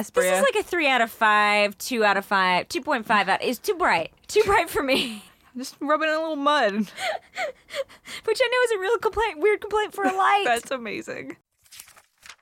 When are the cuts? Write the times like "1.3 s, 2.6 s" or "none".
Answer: 4.2 s, 5.3 s